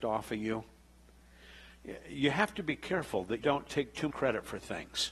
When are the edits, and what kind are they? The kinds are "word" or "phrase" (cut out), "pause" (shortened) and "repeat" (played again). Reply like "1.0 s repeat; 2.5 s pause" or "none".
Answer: 3.4 s word; 4.1 s word